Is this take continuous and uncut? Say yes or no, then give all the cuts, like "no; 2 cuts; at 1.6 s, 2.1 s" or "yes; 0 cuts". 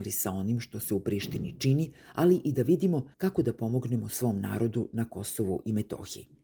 no; 1 cut; at 3.1 s